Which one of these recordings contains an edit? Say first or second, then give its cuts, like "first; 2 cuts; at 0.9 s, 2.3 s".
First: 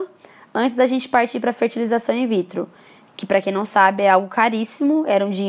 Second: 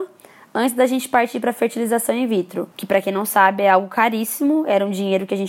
second; 1 cut; at 2.7 s